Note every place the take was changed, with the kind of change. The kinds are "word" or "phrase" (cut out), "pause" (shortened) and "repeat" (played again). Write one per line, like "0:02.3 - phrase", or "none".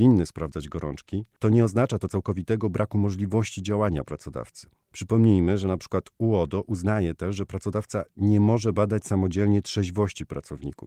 none